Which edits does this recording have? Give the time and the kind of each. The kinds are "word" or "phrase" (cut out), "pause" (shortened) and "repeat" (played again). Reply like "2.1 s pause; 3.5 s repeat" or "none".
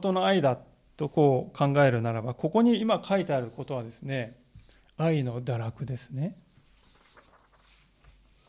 none

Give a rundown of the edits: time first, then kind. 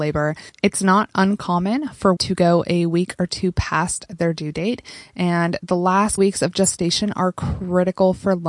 2.2 s word; 6.2 s word

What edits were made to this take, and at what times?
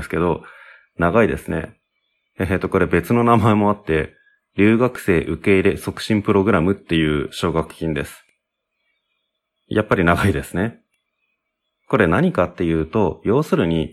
none

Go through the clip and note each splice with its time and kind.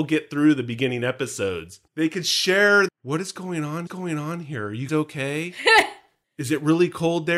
1.9 s pause; 2.9 s word; 3.9 s repeat; 4.9 s word

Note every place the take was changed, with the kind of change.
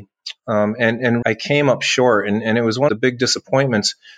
1.2 s word; 2.9 s phrase

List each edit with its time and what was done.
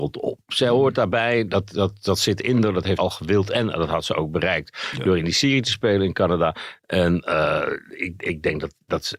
3.0 s phrase

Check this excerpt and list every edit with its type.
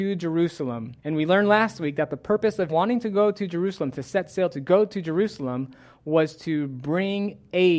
1.0 s pause; 2.7 s word

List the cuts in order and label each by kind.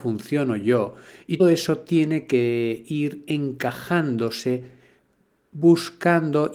1.4 s word

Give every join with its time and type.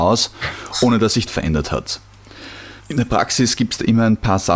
1.3 s phrase; 2.8 s pause

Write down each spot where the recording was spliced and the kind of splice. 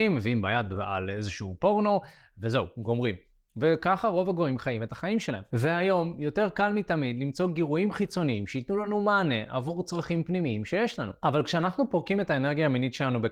none

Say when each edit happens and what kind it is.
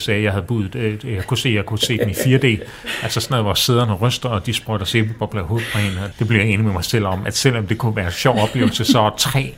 6.1 s word

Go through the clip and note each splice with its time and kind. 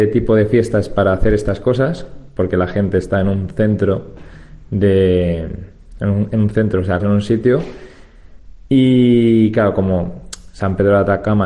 7.0 s word

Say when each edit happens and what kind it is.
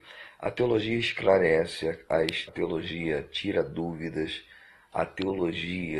2.5 s word

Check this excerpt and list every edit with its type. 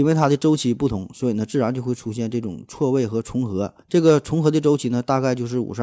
3.8 s pause

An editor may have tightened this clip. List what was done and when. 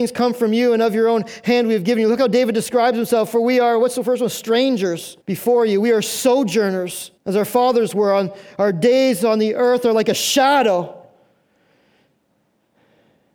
5.2 s pause; 7.2 s pause

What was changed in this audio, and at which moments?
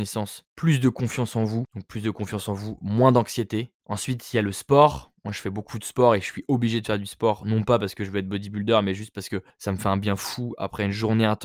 5.2 s pause

